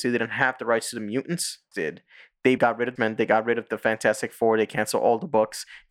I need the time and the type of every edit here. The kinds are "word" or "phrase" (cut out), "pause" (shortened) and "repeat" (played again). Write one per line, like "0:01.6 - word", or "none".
0:01.7 - word
0:02.6 - word
0:03.0 - phrase

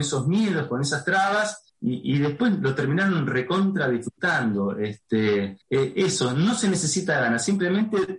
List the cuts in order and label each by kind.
0:01.7 - pause
0:05.6 - pause

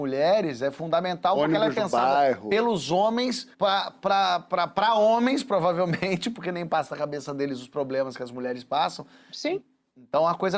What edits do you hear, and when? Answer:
0:03.5 - pause

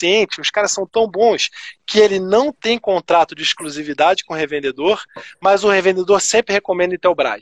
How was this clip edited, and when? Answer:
none

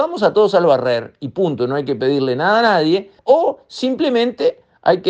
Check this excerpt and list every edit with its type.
0:03.2 - pause

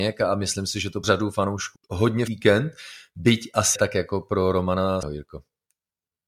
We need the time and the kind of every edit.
0:01.0 - word
0:01.8 - word
0:02.3 - word
0:03.8 - word
0:05.0 - word

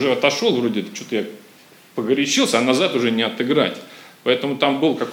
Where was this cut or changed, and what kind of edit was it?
none

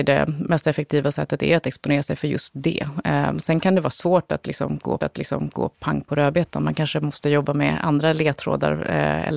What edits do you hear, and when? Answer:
0:05.0 - repeat

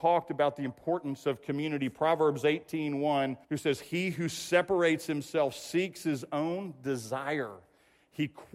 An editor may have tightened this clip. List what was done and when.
0:03.4 - pause

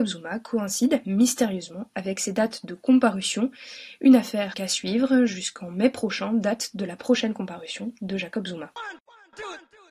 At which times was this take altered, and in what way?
0:04.5 - word

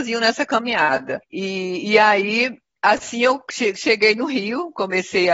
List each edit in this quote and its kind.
none

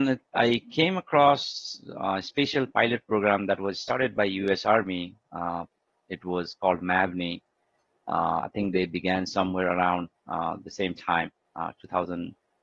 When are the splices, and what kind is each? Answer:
none

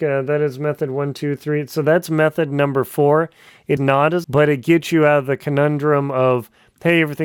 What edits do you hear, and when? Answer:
0:03.8 - word
0:04.2 - word

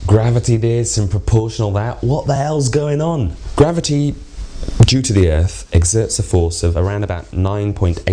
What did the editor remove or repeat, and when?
none

